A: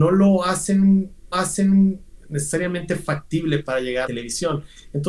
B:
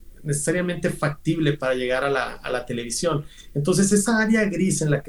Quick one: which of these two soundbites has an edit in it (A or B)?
A